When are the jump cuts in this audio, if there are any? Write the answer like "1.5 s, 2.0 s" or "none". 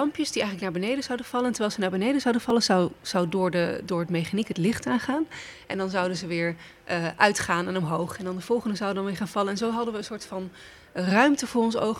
none